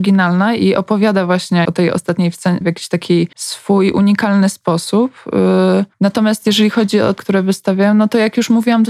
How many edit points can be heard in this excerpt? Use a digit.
5